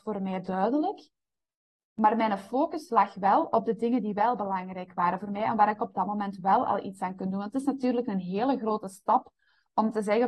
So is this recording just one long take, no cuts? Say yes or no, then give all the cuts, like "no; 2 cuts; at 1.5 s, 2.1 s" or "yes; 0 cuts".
yes; 0 cuts